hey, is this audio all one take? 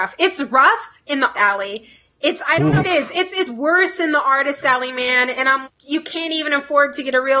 no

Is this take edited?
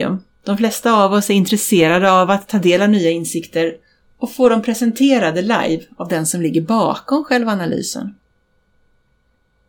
no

